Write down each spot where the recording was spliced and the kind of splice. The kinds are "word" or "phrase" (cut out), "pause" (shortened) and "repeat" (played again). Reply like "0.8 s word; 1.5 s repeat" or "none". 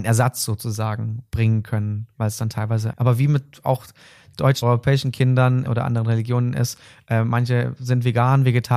2.9 s word; 4.6 s word; 5.7 s word